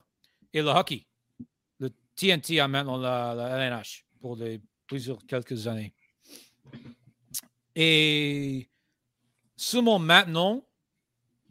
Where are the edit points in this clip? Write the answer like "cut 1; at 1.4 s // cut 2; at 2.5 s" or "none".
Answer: cut 1; at 4.1 s